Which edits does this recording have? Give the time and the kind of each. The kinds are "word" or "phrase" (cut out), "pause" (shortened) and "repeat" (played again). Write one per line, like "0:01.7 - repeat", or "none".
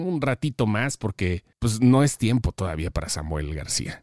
0:01.5 - pause